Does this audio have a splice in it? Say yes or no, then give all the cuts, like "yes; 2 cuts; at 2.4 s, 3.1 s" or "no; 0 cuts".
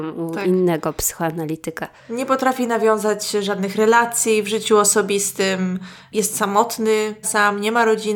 yes; 2 cuts; at 2.0 s, 7.2 s